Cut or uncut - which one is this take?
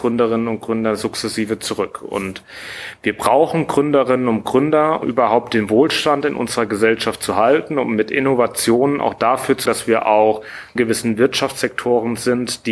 cut